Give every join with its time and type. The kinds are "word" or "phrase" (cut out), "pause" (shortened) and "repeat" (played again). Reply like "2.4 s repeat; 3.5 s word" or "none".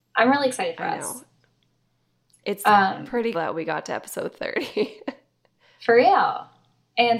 3.3 s word